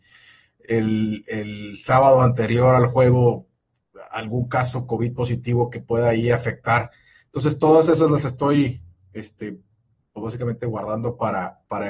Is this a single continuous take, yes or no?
yes